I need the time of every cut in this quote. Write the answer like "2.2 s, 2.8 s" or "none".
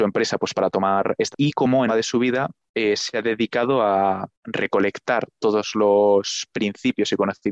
1.3 s, 1.9 s, 4.3 s